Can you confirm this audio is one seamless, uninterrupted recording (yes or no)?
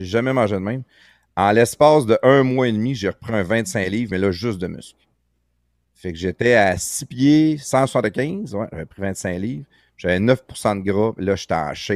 yes